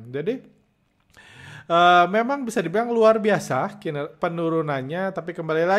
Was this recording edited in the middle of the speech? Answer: no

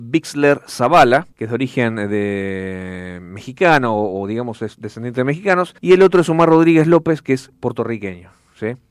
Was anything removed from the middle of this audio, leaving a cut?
yes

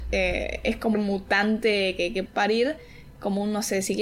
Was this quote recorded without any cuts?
no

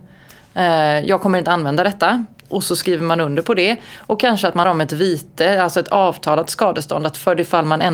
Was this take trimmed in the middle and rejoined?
yes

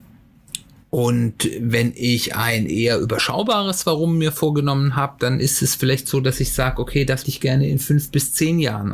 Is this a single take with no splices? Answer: no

